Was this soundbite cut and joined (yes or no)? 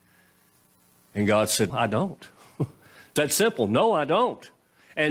yes